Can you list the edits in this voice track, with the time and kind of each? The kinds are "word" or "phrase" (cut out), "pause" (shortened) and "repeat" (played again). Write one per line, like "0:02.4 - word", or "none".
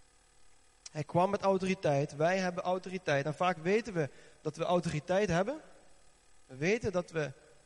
none